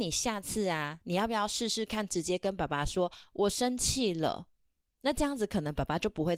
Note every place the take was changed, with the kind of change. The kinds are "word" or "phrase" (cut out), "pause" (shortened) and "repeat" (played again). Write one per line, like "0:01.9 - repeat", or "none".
none